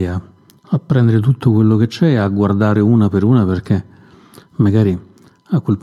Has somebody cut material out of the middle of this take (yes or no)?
no